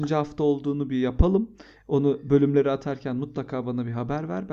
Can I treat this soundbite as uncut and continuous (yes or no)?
yes